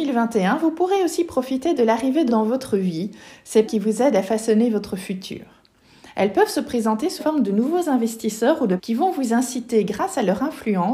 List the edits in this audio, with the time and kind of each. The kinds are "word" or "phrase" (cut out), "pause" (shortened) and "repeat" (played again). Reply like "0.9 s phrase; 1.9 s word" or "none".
2.3 s word; 3.7 s word; 7.2 s word; 8.8 s word

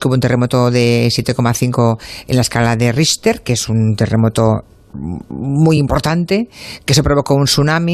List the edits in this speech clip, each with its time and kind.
none

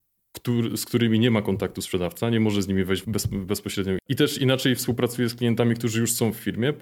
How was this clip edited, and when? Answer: 3.0 s word; 4.0 s word

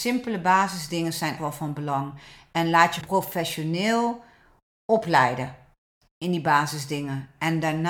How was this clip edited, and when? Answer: 1.4 s word; 3.0 s word

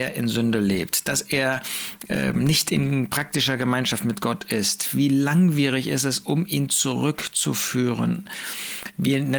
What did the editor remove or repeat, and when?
none

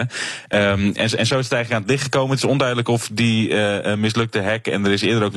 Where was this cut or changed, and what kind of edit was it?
none

